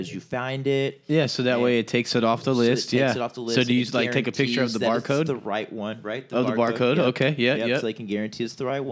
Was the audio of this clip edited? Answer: no; 0 cuts

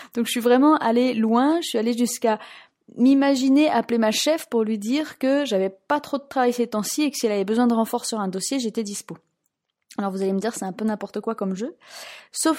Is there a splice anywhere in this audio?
no; 0 cuts

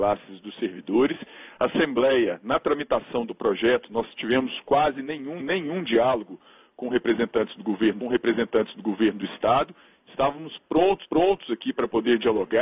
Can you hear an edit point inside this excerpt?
yes; 3 cuts; at 5.4 s, 8.0 s, 11.0 s

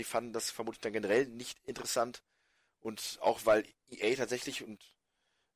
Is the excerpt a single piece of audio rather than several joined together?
yes; 0 cuts

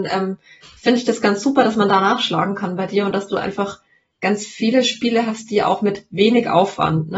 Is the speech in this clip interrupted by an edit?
no; 0 cuts

